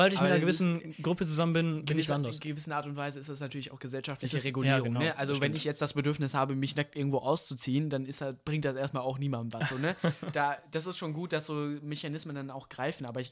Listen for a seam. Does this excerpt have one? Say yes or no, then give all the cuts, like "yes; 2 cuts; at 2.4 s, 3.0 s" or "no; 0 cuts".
no; 0 cuts